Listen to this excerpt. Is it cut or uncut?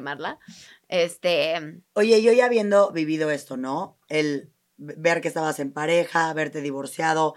uncut